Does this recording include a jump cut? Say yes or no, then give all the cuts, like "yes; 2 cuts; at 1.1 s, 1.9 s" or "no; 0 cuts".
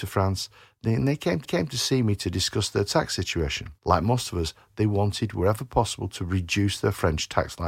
yes; 2 cuts; at 1.4 s, 3.8 s